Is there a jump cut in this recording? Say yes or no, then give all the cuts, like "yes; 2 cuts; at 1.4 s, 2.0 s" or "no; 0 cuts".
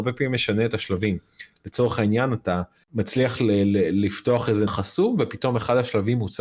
yes; 2 cuts; at 2.8 s, 4.7 s